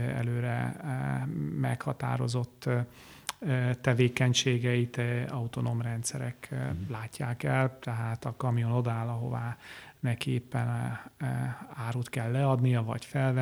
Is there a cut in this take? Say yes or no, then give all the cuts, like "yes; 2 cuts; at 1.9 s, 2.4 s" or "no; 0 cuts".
no; 0 cuts